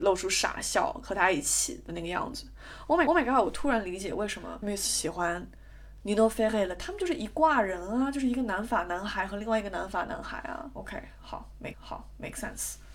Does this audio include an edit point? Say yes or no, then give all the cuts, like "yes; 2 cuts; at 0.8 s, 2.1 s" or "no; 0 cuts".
yes; 3 cuts; at 3.1 s, 4.6 s, 11.7 s